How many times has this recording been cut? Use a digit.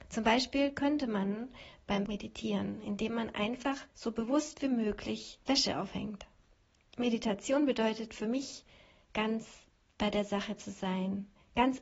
3